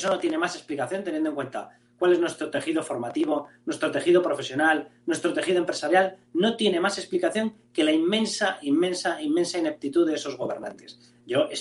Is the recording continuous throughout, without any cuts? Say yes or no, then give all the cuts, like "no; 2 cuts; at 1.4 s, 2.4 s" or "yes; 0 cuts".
yes; 0 cuts